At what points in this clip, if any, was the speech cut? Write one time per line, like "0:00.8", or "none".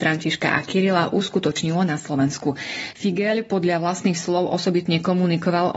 none

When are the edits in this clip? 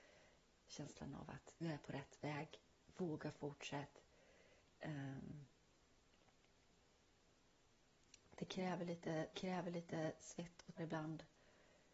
0:01.6
0:04.6
0:09.3
0:10.8

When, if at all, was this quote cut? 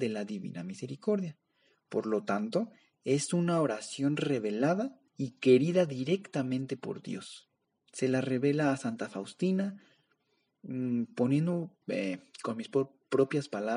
0:05.1
0:07.6
0:11.8

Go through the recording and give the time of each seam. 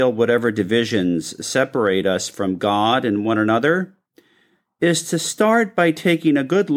none

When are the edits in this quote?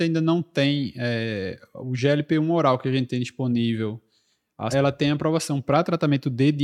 0:04.7

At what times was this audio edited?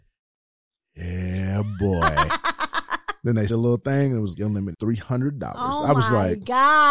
0:03.5
0:04.3
0:04.7

